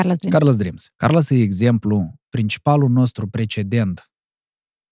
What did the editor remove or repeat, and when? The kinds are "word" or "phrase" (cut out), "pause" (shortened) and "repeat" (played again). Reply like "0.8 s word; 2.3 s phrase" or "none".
0.9 s pause; 2.2 s pause